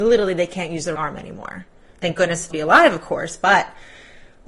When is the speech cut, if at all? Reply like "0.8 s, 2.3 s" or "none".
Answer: 1.0 s, 2.5 s